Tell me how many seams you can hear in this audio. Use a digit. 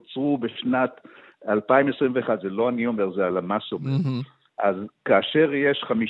0